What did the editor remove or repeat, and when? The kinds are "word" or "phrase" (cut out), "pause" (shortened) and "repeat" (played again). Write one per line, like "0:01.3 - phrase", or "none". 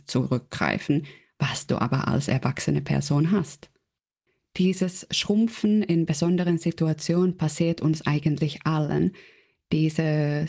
none

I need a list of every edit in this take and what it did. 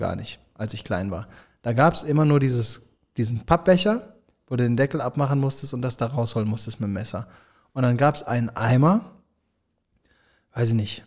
none

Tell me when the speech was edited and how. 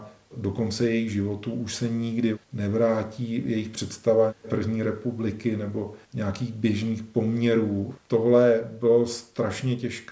0:02.4 - pause
0:06.0 - pause

